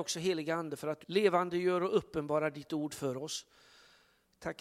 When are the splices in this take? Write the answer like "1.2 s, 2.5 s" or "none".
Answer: 1.0 s